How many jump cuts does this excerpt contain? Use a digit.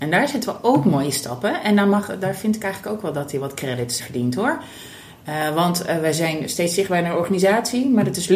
1